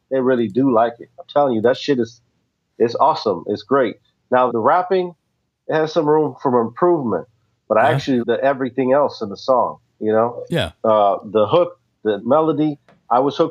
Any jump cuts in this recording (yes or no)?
yes